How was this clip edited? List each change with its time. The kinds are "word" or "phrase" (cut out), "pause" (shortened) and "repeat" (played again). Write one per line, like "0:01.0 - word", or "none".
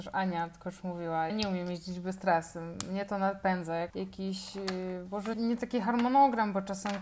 0:01.3 - word
0:03.9 - word
0:05.3 - word